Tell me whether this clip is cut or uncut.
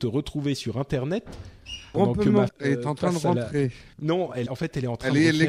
cut